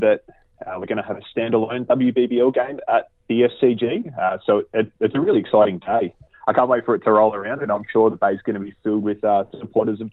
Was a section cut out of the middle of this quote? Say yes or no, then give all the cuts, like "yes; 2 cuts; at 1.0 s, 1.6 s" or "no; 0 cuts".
yes; 1 cut; at 3.2 s